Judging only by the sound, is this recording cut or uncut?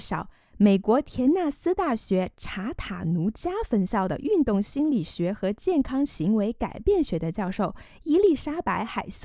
uncut